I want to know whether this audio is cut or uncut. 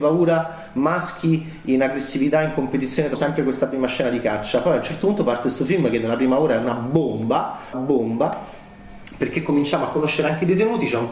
cut